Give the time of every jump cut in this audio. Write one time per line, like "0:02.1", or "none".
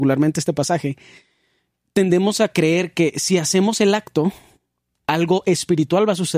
none